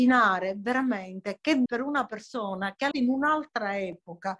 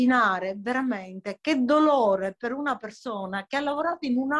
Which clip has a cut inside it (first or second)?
first